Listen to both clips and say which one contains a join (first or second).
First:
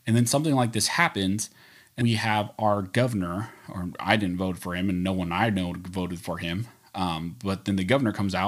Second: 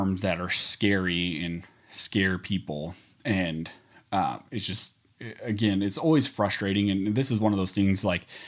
first